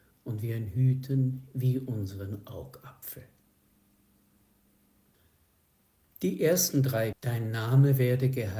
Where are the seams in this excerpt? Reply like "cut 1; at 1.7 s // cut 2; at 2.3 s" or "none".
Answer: cut 1; at 7.1 s

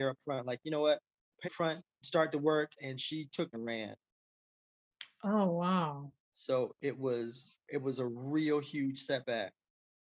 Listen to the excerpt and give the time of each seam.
cut 1; at 1.4 s // cut 2; at 2.0 s // cut 3; at 3.5 s // cut 4; at 6.2 s // cut 5; at 7.6 s

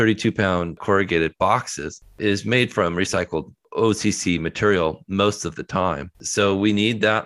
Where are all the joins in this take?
cut 1; at 6.1 s

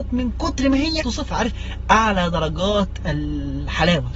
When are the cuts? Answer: cut 1; at 1.0 s

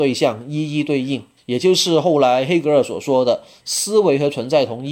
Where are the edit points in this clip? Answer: cut 1; at 1.4 s

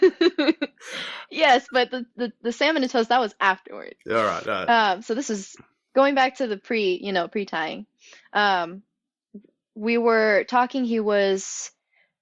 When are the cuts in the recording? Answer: none

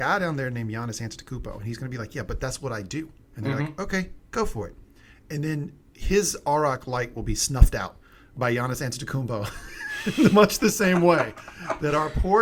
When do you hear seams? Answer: none

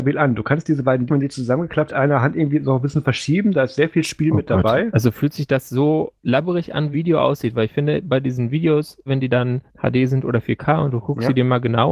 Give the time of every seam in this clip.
cut 1; at 1.1 s // cut 2; at 1.9 s // cut 3; at 6.2 s // cut 4; at 6.9 s // cut 5; at 9.1 s // cut 6; at 9.7 s

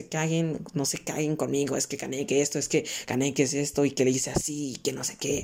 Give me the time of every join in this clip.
none

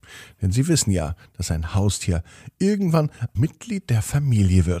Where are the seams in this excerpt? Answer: cut 1; at 3.4 s

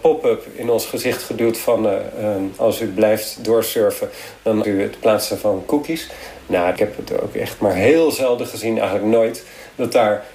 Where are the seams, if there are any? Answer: cut 1; at 4.6 s // cut 2; at 6.8 s

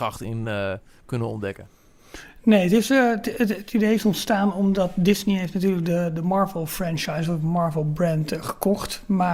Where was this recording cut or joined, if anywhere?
none

